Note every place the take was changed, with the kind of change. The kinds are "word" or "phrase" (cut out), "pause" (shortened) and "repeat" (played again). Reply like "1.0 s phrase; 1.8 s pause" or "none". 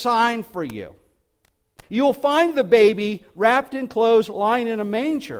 1.8 s pause